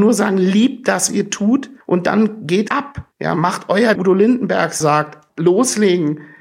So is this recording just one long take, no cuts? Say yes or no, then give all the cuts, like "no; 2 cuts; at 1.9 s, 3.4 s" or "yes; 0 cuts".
no; 7 cuts; at 1.1 s, 1.8 s, 2.7 s, 3.1 s, 4.0 s, 4.8 s, 5.3 s